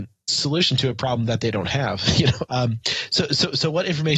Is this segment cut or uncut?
cut